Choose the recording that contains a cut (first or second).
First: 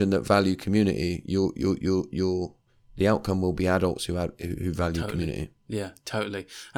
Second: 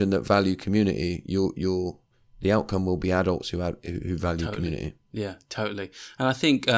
second